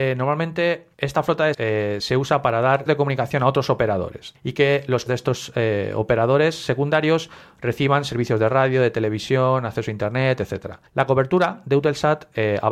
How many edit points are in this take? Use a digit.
5